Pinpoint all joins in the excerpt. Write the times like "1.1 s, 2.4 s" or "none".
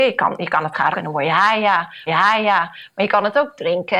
0.9 s, 2.1 s